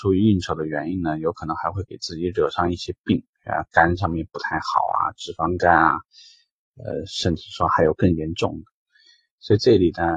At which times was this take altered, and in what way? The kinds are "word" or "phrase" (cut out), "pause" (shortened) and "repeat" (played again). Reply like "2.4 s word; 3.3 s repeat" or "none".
none